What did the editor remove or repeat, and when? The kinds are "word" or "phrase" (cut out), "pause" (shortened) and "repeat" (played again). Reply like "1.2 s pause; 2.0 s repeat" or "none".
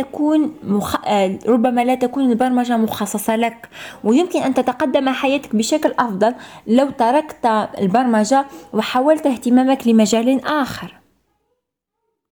none